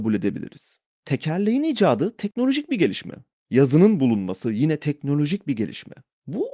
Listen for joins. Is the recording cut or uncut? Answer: uncut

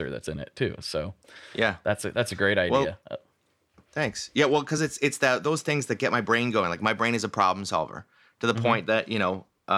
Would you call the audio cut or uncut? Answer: uncut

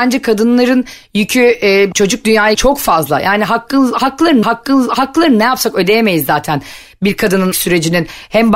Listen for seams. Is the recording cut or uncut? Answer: cut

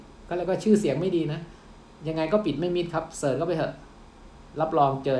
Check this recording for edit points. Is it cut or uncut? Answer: uncut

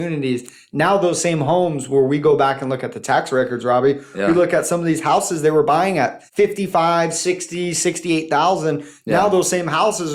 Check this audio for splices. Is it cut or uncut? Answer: cut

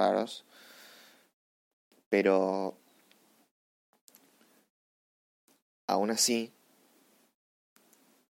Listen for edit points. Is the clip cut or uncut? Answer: uncut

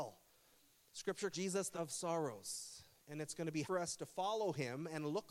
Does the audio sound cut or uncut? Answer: cut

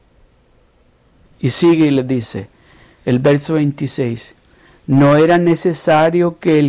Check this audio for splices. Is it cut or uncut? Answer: uncut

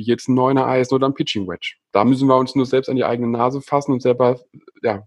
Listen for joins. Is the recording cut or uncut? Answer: uncut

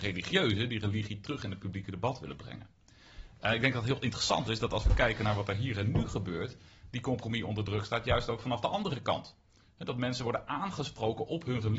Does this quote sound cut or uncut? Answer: uncut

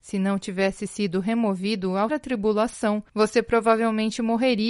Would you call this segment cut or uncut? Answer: cut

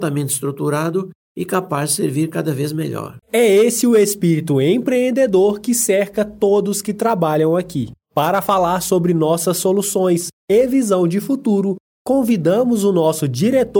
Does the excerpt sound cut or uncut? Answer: cut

